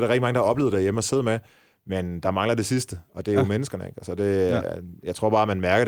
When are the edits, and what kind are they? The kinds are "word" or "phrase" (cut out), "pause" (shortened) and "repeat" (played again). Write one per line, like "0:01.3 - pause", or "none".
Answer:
none